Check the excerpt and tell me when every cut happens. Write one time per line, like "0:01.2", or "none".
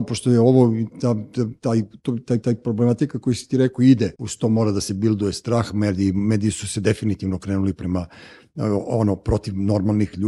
0:00.9
0:02.4
0:04.1